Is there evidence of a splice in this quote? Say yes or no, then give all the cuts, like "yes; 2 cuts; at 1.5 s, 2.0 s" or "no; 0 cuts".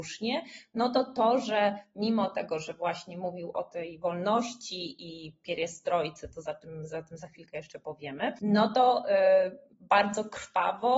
no; 0 cuts